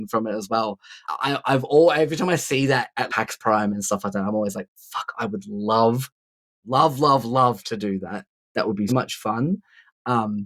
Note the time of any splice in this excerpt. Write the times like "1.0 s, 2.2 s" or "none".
1.0 s, 3.1 s, 8.9 s